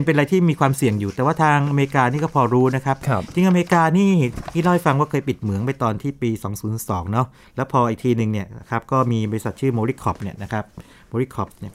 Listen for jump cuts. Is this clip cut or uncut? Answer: cut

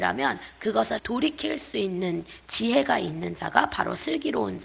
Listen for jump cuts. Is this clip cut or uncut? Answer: cut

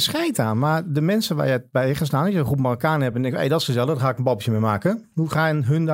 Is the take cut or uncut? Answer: uncut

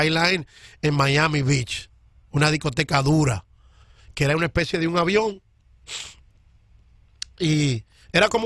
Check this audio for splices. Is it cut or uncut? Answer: uncut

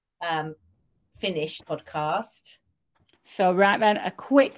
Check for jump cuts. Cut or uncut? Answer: cut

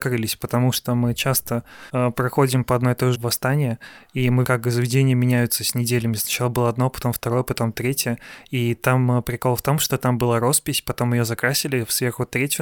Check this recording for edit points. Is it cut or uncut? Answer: cut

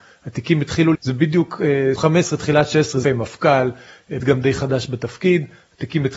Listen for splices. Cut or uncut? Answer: cut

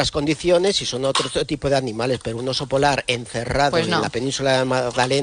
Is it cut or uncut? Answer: uncut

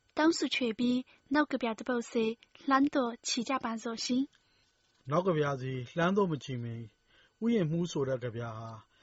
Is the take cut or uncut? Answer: uncut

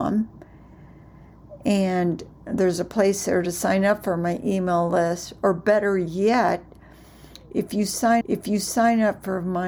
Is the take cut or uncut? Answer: cut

